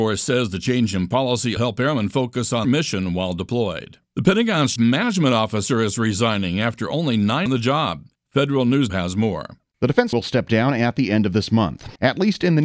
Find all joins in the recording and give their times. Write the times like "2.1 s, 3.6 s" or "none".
1.6 s, 2.6 s, 4.1 s, 4.8 s, 7.5 s, 8.9 s, 10.1 s